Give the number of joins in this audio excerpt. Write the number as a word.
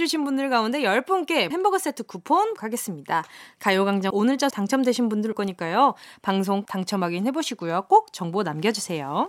six